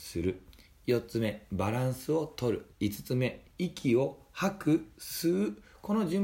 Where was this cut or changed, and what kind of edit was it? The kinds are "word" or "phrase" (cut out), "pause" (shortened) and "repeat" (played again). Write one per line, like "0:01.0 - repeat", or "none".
0:02.7 - pause
0:03.5 - pause